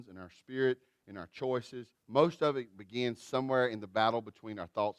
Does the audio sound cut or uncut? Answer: cut